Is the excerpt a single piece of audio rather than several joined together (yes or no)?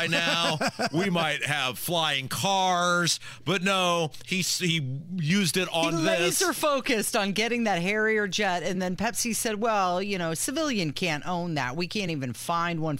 yes